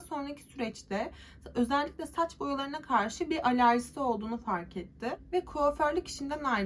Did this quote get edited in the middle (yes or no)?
no